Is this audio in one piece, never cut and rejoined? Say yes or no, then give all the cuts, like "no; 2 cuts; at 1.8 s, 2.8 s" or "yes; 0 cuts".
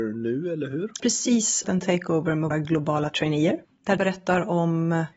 no; 4 cuts; at 1.0 s, 1.6 s, 2.5 s, 4.0 s